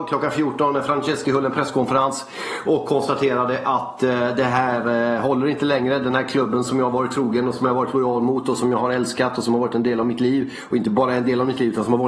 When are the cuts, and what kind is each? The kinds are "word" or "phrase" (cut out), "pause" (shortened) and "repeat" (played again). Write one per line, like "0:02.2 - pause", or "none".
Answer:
0:01.2 - word